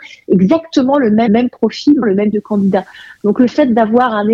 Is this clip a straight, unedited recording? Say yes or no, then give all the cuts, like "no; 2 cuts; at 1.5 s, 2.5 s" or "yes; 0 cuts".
no; 3 cuts; at 1.3 s, 2.0 s, 2.3 s